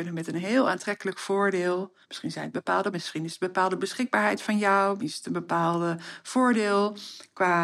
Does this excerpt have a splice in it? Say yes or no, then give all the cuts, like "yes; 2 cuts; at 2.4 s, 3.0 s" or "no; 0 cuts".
yes; 3 cuts; at 2.0 s, 2.9 s, 5.0 s